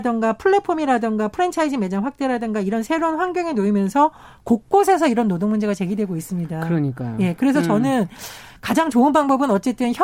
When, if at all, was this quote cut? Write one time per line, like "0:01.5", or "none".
none